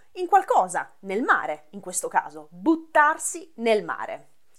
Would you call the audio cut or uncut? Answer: uncut